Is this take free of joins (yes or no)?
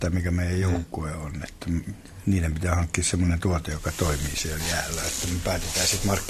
yes